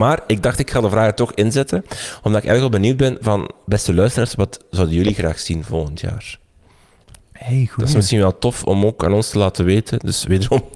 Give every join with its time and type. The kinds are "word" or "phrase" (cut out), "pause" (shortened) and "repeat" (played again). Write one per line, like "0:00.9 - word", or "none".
none